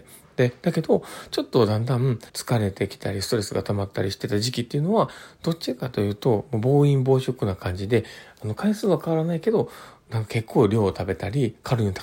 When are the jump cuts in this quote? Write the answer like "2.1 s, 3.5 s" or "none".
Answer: 2.3 s